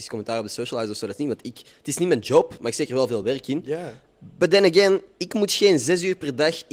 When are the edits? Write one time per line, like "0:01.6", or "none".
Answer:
none